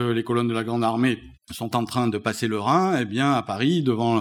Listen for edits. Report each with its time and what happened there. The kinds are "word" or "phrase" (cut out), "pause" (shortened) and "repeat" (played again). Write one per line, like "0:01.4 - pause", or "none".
0:01.4 - pause